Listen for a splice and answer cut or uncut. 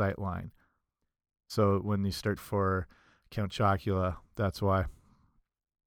cut